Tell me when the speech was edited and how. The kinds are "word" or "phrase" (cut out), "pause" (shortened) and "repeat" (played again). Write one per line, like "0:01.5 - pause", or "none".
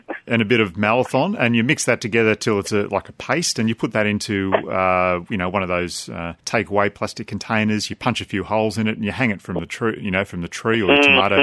0:06.4 - pause